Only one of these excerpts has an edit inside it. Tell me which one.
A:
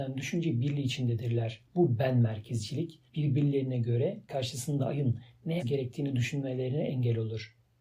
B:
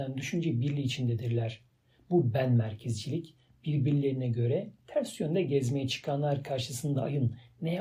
A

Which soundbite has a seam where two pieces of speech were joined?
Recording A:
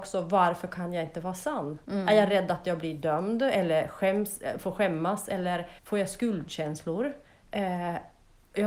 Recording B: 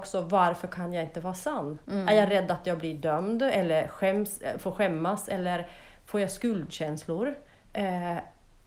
A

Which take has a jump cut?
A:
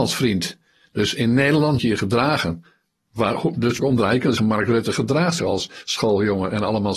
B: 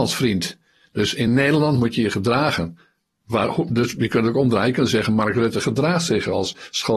A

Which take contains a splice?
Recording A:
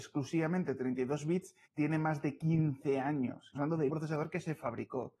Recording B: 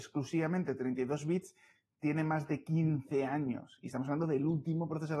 A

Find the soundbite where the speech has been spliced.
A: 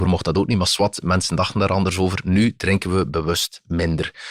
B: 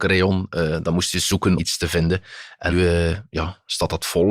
B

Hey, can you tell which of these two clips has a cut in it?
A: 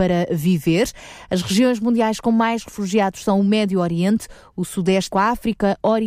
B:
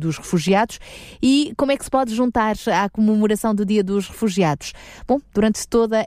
A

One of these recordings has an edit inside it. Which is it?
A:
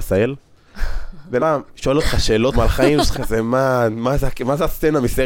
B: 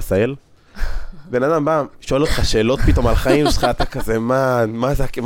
A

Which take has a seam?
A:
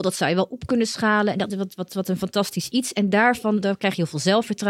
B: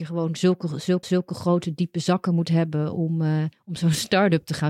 B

